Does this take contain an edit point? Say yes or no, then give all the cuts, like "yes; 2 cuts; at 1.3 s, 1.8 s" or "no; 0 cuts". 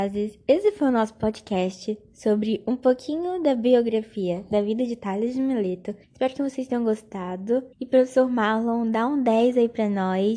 yes; 2 cuts; at 6.0 s, 7.7 s